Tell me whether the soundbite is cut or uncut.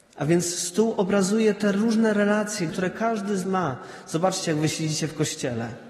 cut